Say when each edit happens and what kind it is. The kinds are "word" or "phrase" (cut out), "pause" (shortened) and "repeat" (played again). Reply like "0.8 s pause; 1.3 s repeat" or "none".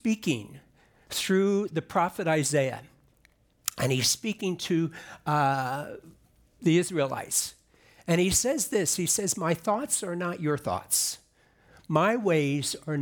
none